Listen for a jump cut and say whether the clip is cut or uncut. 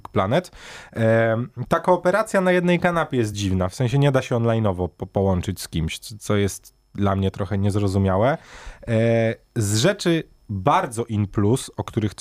uncut